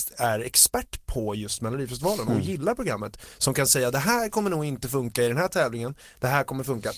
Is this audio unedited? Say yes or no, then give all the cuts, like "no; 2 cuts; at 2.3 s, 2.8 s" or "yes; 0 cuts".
yes; 0 cuts